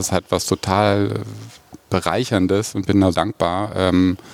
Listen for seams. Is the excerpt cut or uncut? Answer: cut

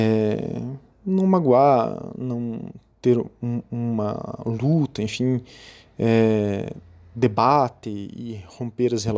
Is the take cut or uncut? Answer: uncut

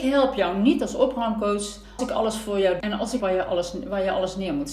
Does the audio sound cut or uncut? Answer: cut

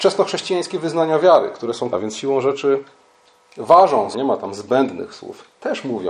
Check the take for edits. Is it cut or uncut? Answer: cut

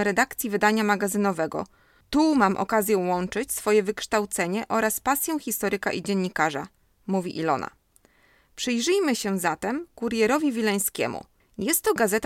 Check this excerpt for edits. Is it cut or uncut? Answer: uncut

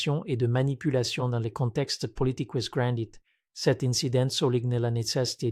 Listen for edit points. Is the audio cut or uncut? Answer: uncut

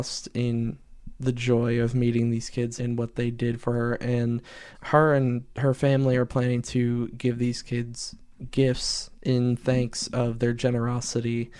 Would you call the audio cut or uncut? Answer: cut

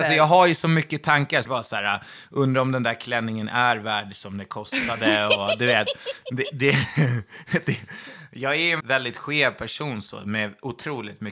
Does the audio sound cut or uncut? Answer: cut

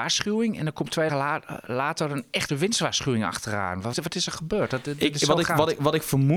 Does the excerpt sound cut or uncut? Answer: cut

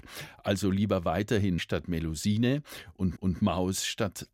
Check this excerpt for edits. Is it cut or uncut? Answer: cut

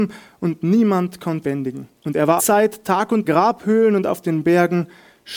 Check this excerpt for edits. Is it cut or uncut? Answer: cut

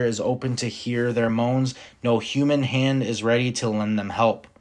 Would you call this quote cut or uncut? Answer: uncut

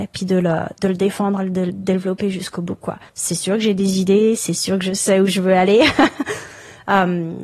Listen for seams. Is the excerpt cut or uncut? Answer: cut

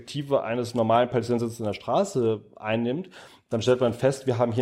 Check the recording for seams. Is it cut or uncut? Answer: uncut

